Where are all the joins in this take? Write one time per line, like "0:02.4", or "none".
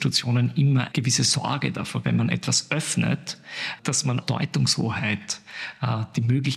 0:00.9
0:02.0
0:03.8
0:04.2

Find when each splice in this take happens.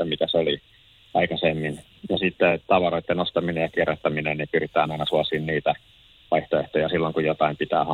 none

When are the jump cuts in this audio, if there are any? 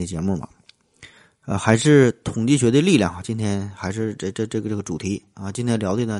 none

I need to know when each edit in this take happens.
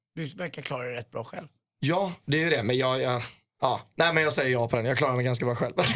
none

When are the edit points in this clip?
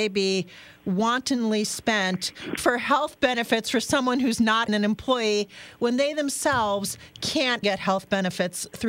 0:02.6
0:04.7
0:07.6

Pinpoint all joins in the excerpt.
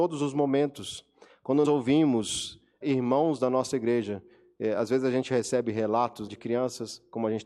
0:01.6
0:02.8
0:06.3

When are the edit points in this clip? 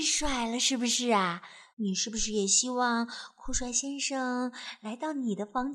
0:01.7

